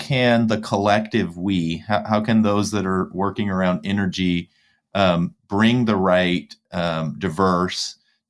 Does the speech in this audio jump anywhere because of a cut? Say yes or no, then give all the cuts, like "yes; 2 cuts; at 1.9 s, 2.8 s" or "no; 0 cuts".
no; 0 cuts